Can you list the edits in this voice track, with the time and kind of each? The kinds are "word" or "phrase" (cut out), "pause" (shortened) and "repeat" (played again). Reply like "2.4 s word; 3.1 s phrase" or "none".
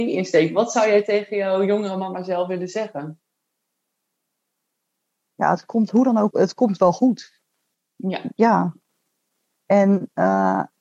6.3 s word